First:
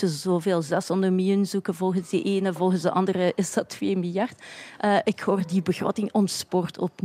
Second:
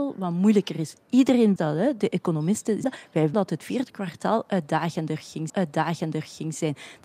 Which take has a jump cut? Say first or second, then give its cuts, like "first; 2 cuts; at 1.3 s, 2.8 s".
second; 4 cuts; at 1.6 s, 2.8 s, 3.3 s, 5.5 s